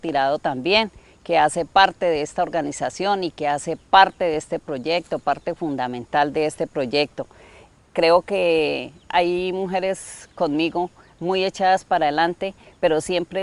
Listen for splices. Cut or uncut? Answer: uncut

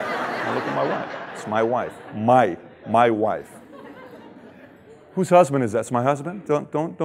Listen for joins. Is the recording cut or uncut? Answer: uncut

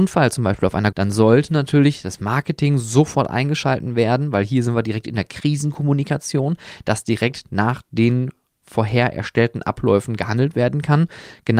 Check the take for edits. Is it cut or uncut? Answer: cut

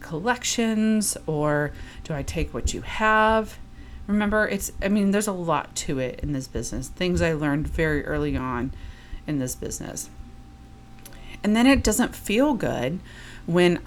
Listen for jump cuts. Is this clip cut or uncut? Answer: uncut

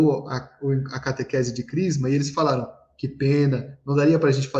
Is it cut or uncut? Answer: uncut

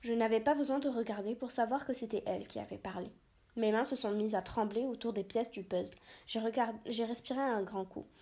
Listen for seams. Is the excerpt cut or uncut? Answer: uncut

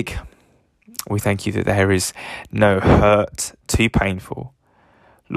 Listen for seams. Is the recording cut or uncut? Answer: uncut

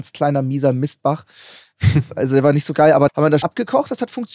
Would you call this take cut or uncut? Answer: cut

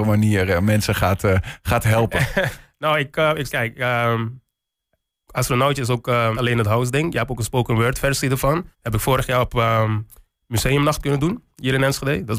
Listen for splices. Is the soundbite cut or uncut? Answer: cut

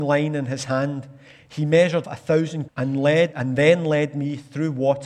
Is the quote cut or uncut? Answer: cut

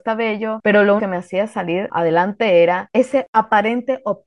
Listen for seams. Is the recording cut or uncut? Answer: cut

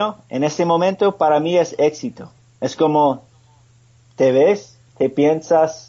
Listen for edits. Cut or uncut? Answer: uncut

